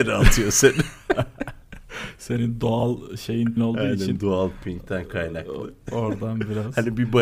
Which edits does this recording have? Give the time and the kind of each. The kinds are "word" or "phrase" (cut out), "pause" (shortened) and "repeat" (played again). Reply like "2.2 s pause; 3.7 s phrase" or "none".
3.6 s word